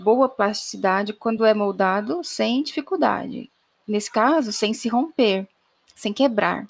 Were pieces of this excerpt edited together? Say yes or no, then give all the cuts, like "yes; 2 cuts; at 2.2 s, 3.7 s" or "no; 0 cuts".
no; 0 cuts